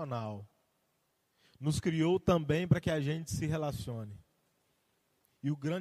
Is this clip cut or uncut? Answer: uncut